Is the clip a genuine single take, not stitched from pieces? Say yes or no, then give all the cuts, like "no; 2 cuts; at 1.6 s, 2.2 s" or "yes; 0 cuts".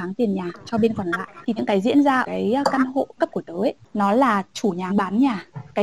no; 4 cuts; at 1.6 s, 2.2 s, 3.2 s, 4.9 s